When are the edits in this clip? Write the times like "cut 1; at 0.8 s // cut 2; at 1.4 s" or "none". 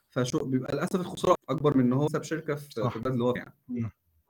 cut 1; at 1.4 s // cut 2; at 2.1 s // cut 3; at 3.3 s